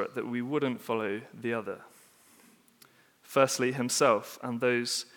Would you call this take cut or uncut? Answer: uncut